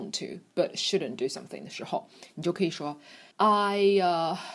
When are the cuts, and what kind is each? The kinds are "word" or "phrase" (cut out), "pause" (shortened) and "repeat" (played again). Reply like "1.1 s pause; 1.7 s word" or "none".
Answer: 3.3 s pause